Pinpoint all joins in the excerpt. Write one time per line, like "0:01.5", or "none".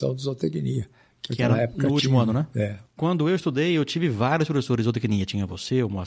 none